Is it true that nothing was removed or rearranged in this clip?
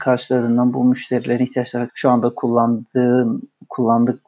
no; 1 cut; at 1.9 s

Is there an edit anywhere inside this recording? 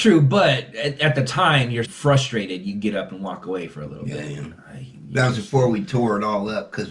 yes; 1 cut; at 1.8 s

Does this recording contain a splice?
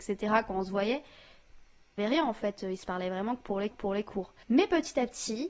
yes; 2 cuts; at 2.0 s, 3.7 s

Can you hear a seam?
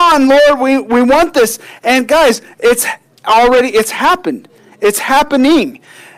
no; 0 cuts

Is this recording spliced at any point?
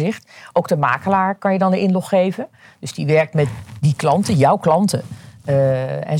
no; 0 cuts

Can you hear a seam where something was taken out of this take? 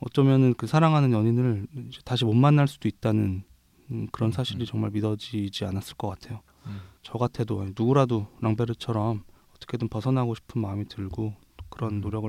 yes; 2 cuts; at 7.0 s, 9.4 s

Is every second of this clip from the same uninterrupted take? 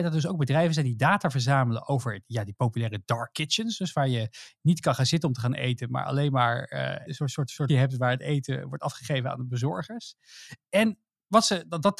no; 2 cuts; at 7.1 s, 7.7 s

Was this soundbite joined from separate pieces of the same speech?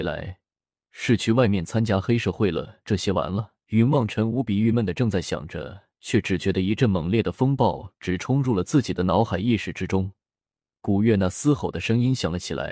yes; 2 cuts; at 3.6 s, 5.9 s

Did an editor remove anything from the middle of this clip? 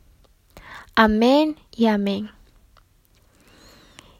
yes; 1 cut; at 1.6 s

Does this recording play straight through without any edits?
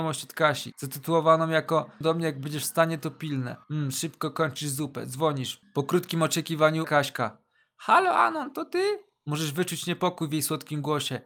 no; 3 cuts; at 2.0 s, 3.6 s, 6.8 s

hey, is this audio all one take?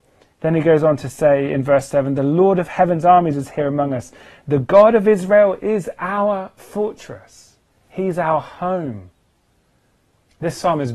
no; 1 cut; at 7.6 s

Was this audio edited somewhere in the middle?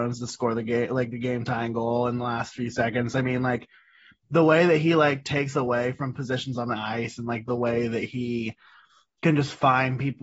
no; 0 cuts

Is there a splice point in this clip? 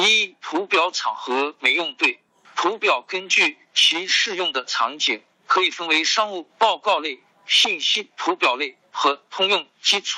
no; 0 cuts

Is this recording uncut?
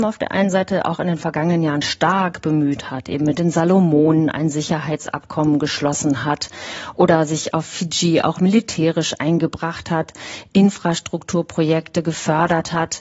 yes; 0 cuts

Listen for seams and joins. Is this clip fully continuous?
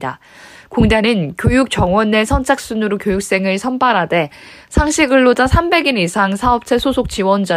yes; 0 cuts

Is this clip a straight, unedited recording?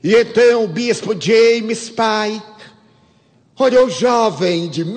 yes; 0 cuts

